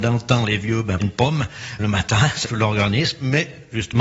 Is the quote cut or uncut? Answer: cut